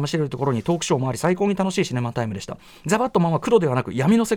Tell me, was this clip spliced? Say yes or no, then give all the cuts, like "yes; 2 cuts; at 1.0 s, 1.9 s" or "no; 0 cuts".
no; 0 cuts